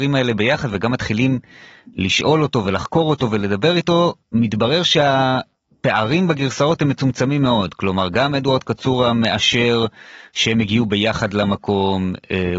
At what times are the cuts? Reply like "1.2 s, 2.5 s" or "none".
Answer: 4.2 s